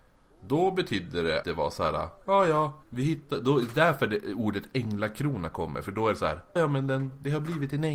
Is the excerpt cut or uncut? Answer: cut